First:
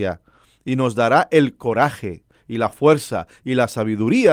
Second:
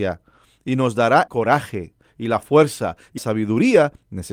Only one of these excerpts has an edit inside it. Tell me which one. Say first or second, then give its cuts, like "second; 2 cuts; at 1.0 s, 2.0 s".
second; 2 cuts; at 1.3 s, 3.2 s